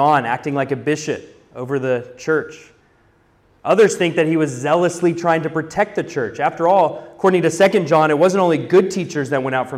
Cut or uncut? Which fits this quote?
uncut